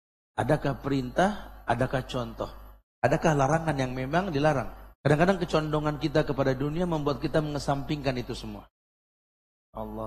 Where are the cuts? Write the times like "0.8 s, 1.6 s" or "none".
4.9 s